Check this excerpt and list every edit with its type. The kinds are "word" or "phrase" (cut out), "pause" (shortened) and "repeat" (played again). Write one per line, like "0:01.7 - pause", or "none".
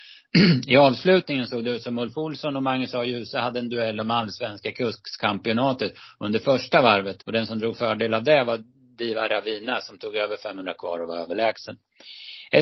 0:07.2 - pause